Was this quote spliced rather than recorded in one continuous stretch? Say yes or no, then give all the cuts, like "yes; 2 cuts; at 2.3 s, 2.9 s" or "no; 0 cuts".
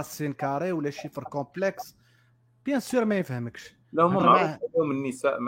no; 0 cuts